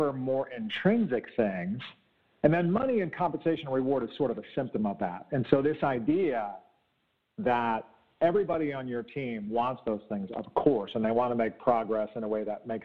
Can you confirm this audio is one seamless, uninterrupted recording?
yes; 0 cuts

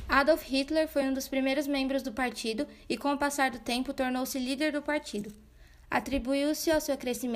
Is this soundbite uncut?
yes; 0 cuts

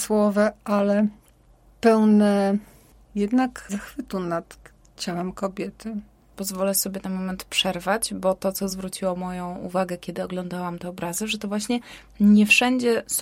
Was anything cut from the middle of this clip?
no; 0 cuts

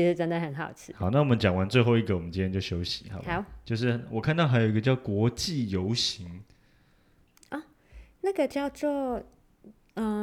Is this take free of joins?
yes; 0 cuts

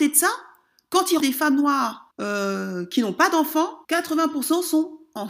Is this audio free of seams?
no; 3 cuts; at 1.2 s, 2.1 s, 3.8 s

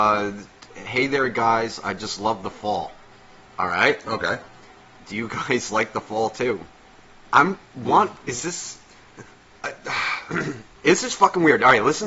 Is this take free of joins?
yes; 0 cuts

